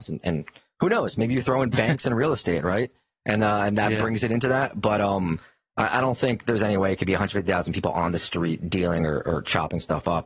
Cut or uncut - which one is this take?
uncut